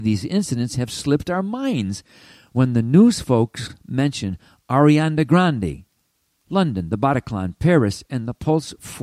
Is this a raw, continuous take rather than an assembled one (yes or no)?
yes